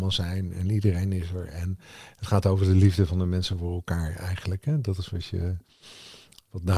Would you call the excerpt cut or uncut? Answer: uncut